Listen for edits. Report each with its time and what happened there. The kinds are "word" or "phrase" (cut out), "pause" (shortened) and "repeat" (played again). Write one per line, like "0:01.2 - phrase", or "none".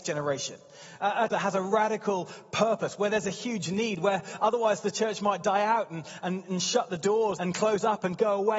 0:01.3 - word
0:07.4 - word